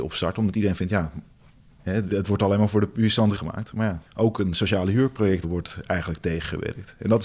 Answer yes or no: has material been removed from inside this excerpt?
yes